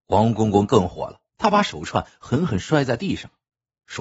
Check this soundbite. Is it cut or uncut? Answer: cut